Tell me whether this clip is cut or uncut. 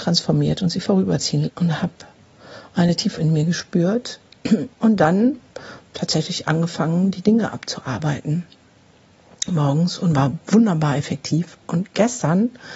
cut